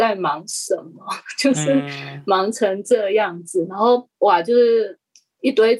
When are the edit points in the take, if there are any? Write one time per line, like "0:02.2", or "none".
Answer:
0:04.1